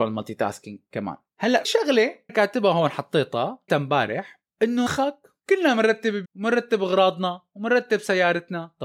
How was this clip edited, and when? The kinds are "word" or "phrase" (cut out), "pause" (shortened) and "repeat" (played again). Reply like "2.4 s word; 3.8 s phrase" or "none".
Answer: 1.6 s word; 2.3 s word; 3.7 s word; 4.9 s word; 5.4 s pause; 6.3 s word